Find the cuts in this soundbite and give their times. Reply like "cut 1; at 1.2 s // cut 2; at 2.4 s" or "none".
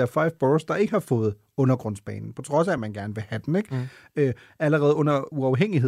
none